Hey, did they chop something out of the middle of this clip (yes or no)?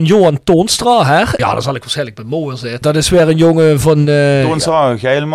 no